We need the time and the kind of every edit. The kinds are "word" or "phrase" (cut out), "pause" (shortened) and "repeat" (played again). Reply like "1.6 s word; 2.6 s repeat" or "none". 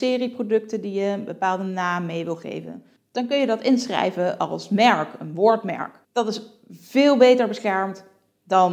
3.0 s pause; 6.0 s pause